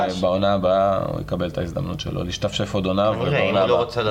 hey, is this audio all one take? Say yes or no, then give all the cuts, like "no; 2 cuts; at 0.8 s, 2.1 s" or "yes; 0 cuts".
yes; 0 cuts